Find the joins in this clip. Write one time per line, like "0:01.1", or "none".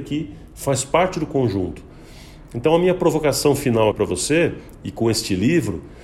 0:03.9